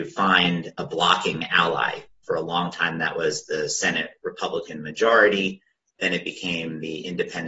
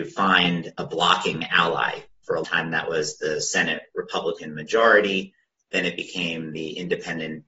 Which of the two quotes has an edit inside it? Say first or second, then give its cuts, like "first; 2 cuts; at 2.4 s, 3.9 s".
second; 1 cut; at 2.4 s